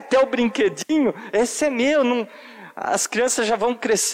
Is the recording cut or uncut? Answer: uncut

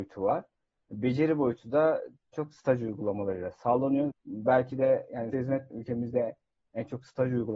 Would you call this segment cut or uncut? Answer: cut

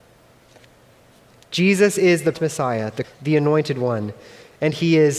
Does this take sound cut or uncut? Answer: cut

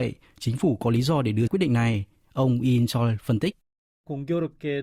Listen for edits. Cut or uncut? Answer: cut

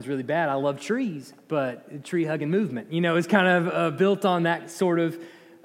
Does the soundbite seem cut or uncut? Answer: uncut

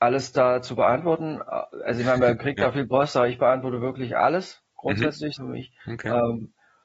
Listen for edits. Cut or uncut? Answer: cut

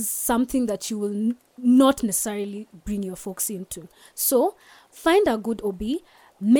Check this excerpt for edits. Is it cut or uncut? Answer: uncut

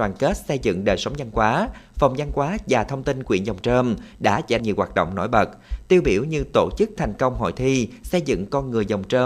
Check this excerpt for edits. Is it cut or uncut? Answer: cut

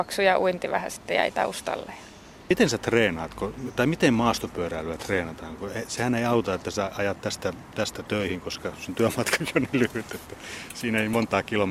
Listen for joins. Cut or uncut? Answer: uncut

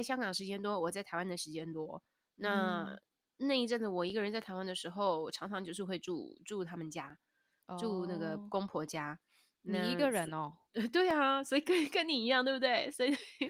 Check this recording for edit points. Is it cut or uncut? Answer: uncut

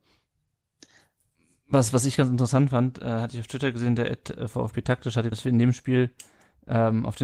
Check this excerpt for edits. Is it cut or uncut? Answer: cut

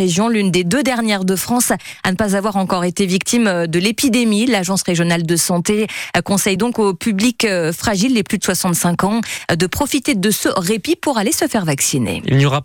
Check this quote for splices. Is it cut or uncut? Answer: uncut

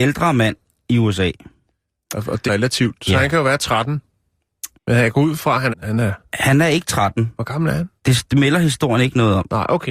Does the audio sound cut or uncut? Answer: cut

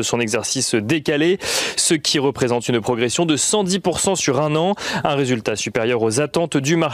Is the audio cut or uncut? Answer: uncut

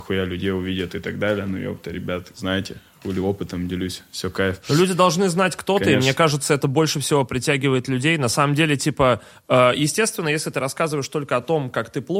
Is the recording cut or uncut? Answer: cut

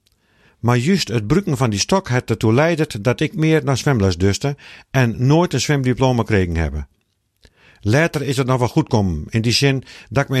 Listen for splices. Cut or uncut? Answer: cut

